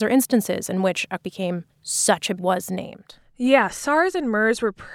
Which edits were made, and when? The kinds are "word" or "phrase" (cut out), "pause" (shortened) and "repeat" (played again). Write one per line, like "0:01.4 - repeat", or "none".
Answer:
0:01.2 - word
0:01.7 - pause
0:02.4 - phrase